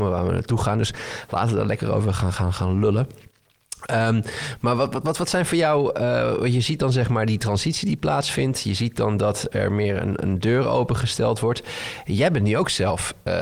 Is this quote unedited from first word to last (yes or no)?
yes